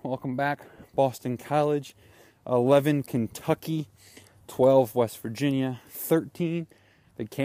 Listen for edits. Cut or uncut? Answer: uncut